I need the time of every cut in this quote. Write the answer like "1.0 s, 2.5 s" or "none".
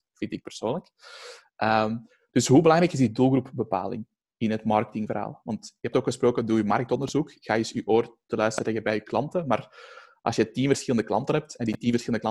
5.9 s